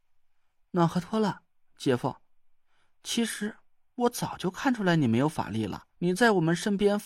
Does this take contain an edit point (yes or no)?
yes